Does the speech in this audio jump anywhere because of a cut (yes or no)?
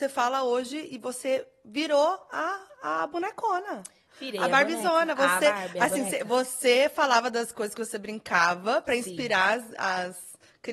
no